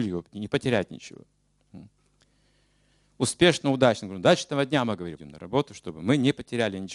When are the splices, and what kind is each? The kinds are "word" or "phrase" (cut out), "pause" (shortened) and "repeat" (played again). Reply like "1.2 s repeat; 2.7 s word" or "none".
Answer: 5.2 s word